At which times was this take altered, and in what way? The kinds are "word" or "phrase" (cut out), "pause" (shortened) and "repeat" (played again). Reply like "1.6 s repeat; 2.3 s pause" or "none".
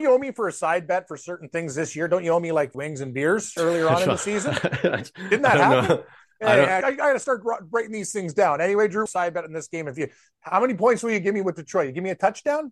2.7 s phrase; 3.6 s phrase; 6.8 s word; 9.1 s phrase